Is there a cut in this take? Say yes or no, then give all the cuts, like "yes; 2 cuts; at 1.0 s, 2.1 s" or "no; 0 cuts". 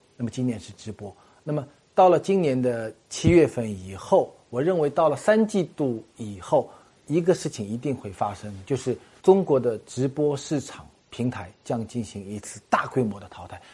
no; 0 cuts